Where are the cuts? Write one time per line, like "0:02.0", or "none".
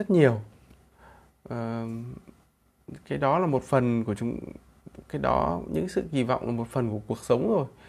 none

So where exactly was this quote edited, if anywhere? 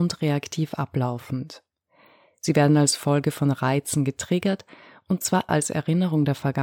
0:05.5

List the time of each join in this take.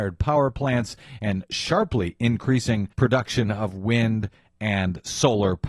0:02.9

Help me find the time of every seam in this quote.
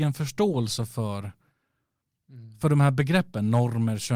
none

